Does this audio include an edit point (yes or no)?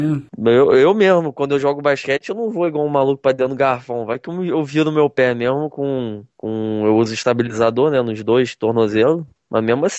no